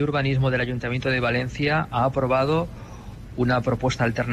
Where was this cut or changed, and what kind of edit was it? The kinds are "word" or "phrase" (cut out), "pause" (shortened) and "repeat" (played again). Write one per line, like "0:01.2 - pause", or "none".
none